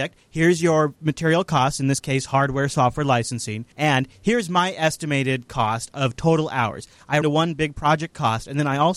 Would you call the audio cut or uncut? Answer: cut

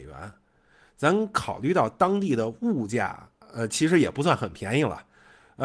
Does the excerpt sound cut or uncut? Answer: uncut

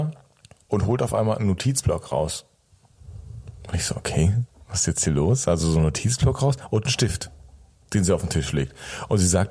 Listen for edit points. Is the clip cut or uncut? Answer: uncut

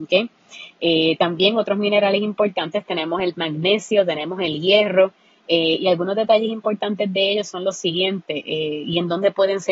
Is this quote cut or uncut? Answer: uncut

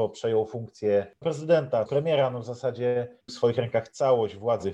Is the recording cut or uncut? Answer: cut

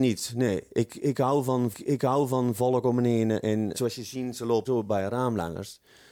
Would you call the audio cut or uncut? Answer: cut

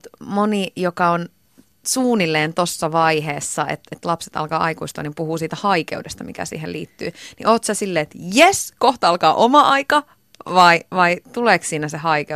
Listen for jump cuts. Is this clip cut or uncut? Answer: uncut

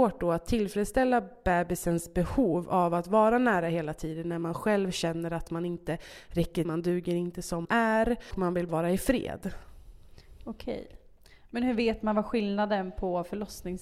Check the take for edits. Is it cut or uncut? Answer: cut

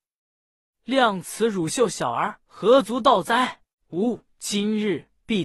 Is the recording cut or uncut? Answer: cut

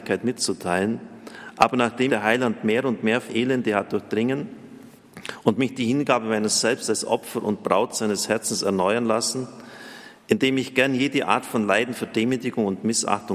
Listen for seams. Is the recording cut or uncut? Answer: cut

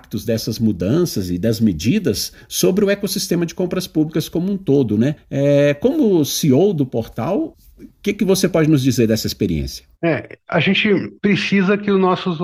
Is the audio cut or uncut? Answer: cut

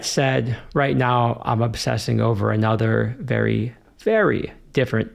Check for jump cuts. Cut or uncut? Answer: uncut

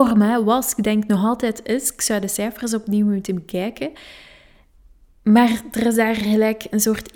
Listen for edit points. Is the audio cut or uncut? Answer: uncut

